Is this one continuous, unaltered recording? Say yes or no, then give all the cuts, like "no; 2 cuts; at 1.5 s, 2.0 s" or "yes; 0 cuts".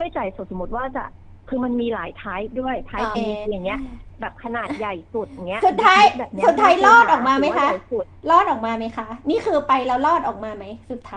no; 2 cuts; at 3.1 s, 3.5 s